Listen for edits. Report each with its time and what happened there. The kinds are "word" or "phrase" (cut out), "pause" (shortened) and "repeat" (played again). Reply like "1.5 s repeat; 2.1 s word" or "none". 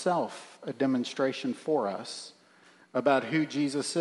none